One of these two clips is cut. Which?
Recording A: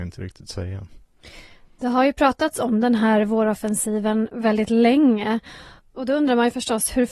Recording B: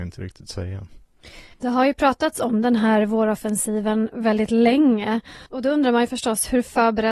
B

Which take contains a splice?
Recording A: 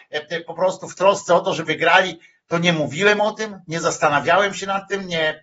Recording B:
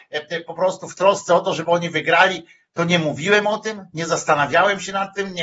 A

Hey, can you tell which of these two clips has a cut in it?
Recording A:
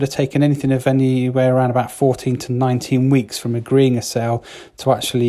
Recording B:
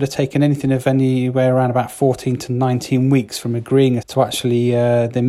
B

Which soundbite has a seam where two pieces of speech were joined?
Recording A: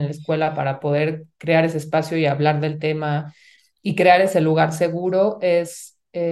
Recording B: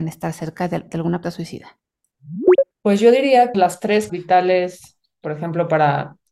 B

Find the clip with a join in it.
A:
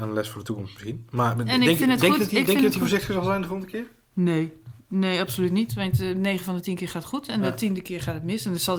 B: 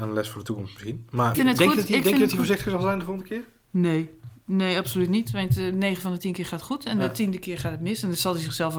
B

